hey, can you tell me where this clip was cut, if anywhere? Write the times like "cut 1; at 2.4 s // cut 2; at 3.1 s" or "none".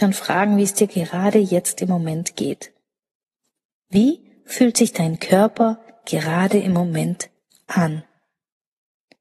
none